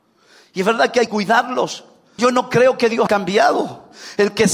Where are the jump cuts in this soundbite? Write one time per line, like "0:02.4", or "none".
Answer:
0:01.1
0:02.2
0:03.1